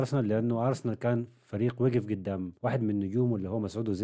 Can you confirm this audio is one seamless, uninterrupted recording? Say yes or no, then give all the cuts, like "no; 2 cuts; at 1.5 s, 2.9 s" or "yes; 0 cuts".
no; 1 cut; at 2.6 s